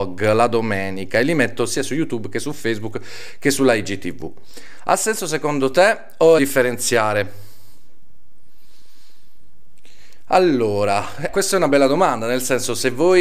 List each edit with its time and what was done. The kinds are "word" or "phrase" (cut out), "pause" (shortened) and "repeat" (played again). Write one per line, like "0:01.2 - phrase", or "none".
0:06.4 - phrase
0:11.3 - word